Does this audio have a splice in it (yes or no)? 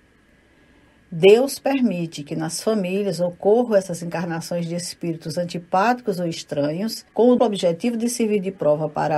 yes